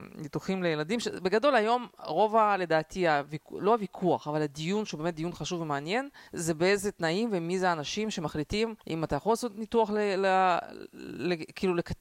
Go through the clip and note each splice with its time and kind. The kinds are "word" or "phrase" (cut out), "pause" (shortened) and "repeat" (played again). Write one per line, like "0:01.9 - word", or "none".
0:06.3 - pause
0:08.8 - pause